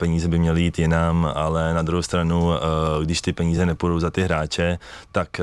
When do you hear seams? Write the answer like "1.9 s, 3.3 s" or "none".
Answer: none